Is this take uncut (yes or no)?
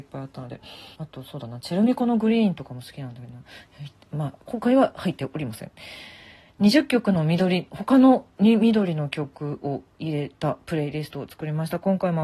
no